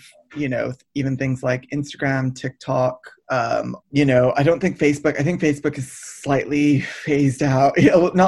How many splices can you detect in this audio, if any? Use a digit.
1